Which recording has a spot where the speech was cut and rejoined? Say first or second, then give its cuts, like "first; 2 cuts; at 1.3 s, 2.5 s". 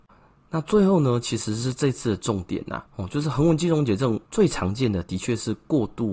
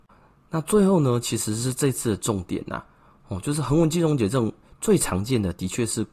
first; 2 cuts; at 2.9 s, 4.3 s